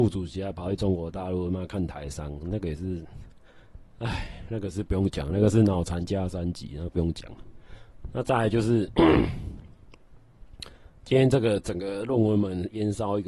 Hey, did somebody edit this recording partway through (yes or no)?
no